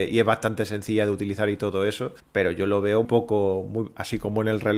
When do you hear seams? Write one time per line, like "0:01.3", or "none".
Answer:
0:02.2
0:03.0

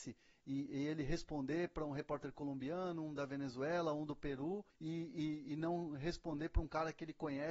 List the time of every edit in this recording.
0:04.7

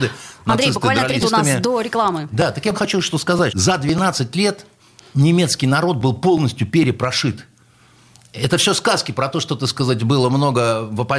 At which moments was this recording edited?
0:01.2
0:02.7
0:03.5

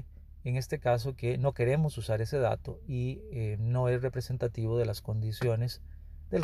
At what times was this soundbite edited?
none

